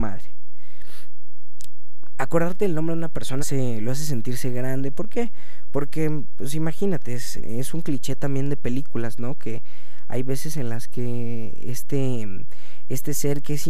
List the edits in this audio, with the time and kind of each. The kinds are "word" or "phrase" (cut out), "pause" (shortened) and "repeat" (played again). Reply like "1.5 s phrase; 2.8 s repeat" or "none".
3.4 s word; 7.4 s word